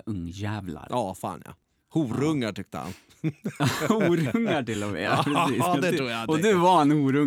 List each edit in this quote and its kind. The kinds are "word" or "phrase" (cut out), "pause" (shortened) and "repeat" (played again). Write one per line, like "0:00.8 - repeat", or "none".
none